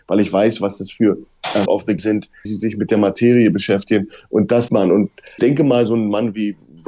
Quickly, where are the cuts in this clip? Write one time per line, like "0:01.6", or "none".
0:01.7
0:02.0
0:02.4
0:04.7
0:05.4